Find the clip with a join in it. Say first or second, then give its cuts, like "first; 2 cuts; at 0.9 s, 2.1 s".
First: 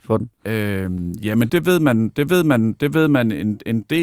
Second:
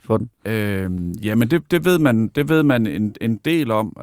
first; 2 cuts; at 1.5 s, 2.3 s